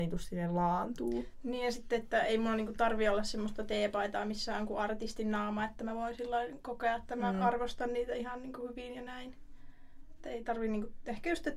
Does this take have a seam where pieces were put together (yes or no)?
no